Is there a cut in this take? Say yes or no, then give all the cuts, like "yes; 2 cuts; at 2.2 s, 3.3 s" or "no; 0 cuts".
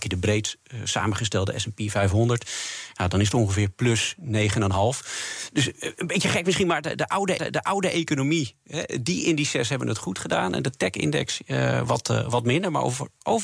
yes; 1 cut; at 7.4 s